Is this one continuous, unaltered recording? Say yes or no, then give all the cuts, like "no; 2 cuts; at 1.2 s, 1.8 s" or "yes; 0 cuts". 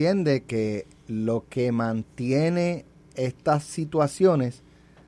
yes; 0 cuts